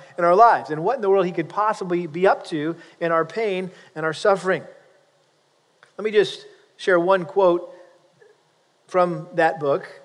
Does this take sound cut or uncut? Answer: uncut